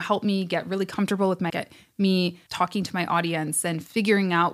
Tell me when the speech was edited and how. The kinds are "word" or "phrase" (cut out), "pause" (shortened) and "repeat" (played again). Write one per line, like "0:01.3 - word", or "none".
0:01.5 - word
0:02.5 - word